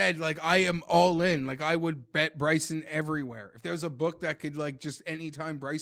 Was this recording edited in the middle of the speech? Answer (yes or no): no